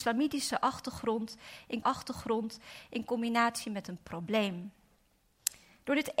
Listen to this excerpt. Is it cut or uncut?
cut